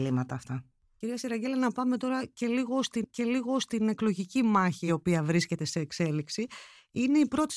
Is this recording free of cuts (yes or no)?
no